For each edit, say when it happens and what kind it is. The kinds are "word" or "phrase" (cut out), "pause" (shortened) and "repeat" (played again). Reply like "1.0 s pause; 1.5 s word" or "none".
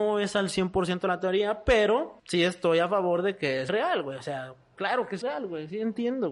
2.2 s pause; 3.7 s word; 5.2 s phrase